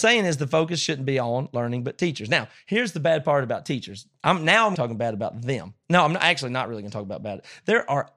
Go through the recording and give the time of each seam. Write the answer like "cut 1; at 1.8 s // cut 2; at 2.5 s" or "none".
cut 1; at 4.7 s